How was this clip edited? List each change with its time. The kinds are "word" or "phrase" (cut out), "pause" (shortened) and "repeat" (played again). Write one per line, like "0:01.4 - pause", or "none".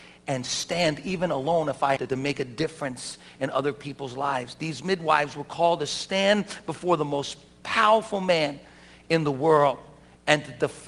0:02.0 - word

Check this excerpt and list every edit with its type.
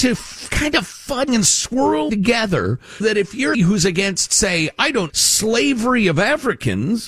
0:01.3 - word
0:02.1 - word
0:03.0 - word
0:03.5 - word
0:05.1 - word

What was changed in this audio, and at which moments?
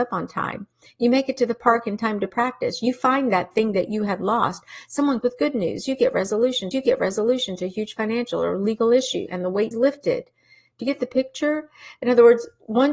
0:05.2 - word
0:06.7 - repeat
0:09.7 - word

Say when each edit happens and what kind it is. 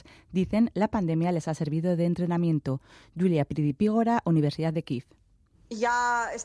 none

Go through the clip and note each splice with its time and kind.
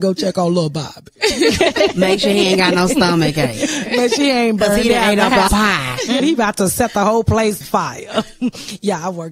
0:05.5 - word
0:06.2 - word
0:07.6 - word

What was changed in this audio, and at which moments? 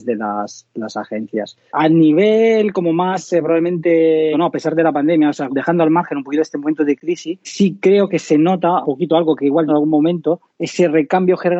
0:04.3 - word
0:05.5 - word
0:07.4 - word
0:08.8 - word
0:09.7 - phrase
0:10.5 - pause

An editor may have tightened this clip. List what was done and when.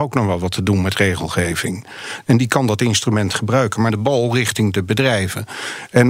0:03.9 - phrase

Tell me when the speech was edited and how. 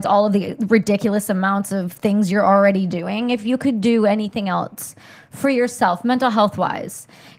none

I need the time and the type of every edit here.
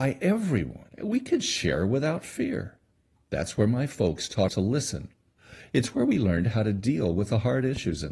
0:00.9 - pause
0:02.9 - pause
0:04.5 - word

